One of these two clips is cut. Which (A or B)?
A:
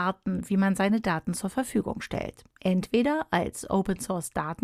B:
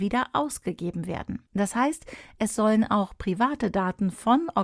B